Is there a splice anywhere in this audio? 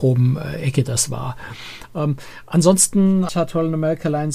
yes; 1 cut; at 3.3 s

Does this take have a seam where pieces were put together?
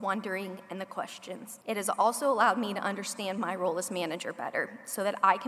yes; 1 cut; at 1.6 s

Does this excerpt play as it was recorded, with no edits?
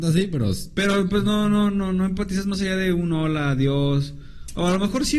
yes; 0 cuts

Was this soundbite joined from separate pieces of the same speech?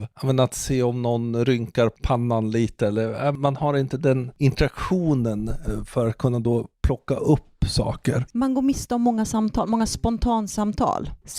no; 0 cuts

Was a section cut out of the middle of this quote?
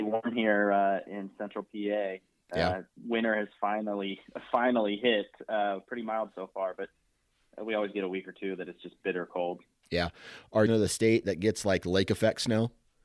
yes; 1 cut; at 10.7 s

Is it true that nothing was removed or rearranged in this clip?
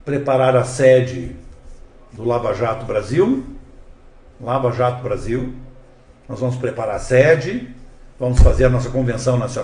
yes; 0 cuts

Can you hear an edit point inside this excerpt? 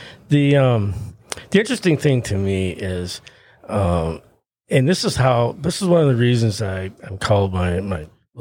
no; 0 cuts

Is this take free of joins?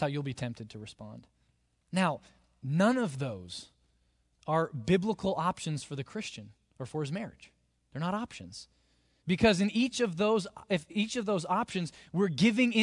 yes; 0 cuts

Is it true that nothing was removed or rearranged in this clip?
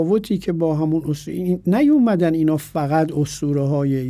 yes; 0 cuts

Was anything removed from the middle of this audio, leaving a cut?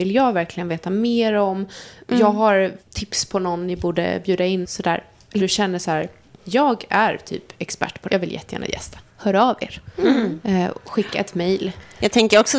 yes; 4 cuts; at 2.8 s, 4.6 s, 5.4 s, 8.1 s

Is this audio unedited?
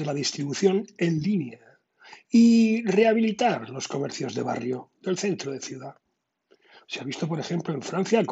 yes; 0 cuts

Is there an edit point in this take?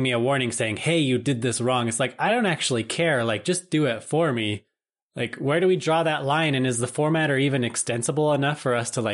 no; 0 cuts

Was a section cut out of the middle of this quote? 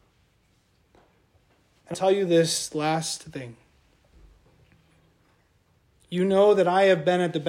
yes; 1 cut; at 1.9 s

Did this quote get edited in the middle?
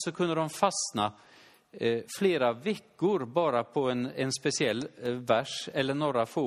no; 0 cuts

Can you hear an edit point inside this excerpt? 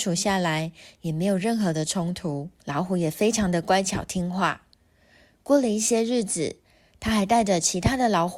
yes; 1 cut; at 2.6 s

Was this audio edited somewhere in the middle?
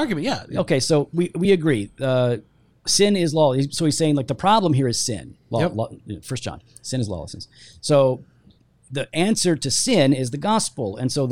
no; 0 cuts

